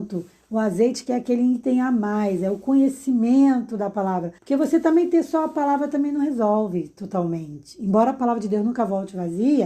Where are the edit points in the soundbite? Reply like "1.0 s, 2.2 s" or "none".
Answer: 4.4 s